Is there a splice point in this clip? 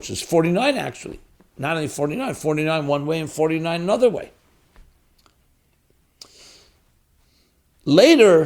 no; 0 cuts

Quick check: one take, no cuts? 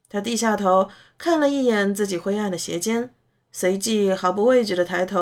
yes; 0 cuts

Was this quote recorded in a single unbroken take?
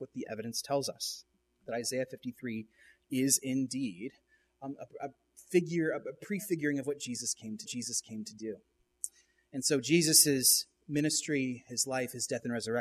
no; 2 cuts; at 1.3 s, 7.7 s

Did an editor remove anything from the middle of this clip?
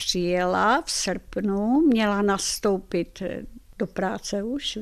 no; 0 cuts

